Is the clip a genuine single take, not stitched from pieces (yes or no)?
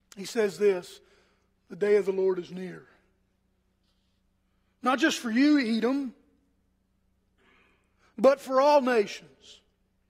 yes